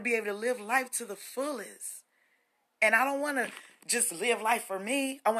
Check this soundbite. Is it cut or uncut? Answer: uncut